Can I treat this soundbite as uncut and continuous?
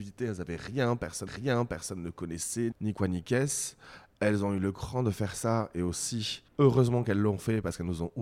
no; 3 cuts; at 1.3 s, 2.7 s, 6.5 s

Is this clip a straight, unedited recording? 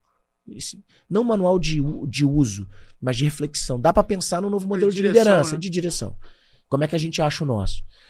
yes; 0 cuts

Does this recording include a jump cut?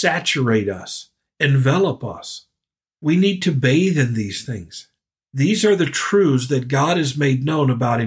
no; 0 cuts

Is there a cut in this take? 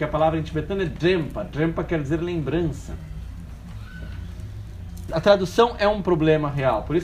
yes; 1 cut; at 5.1 s

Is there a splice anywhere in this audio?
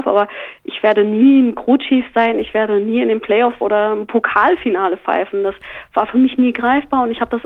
yes; 1 cut; at 3.6 s

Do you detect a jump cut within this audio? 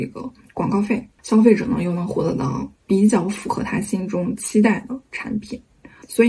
yes; 2 cuts; at 1.1 s, 2.8 s

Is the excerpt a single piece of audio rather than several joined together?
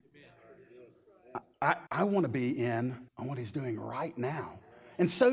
no; 2 cuts; at 1.9 s, 3.1 s

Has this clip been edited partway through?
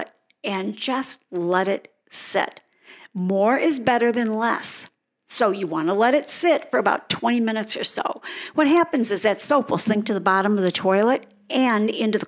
no; 0 cuts

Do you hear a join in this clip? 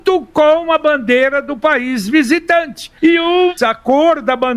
yes; 2 cuts; at 3.0 s, 3.6 s

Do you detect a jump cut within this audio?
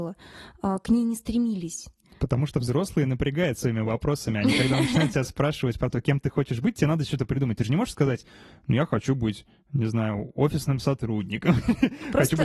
no; 0 cuts

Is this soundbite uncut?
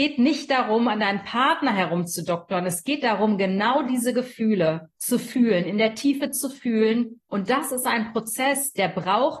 no; 2 cuts; at 4.9 s, 7.2 s

